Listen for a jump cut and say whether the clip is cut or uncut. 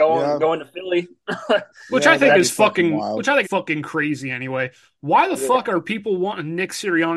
cut